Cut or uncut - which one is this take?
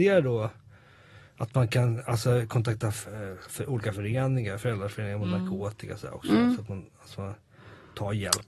uncut